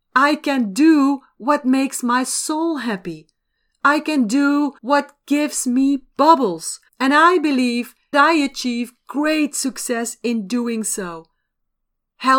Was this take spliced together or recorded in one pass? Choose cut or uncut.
cut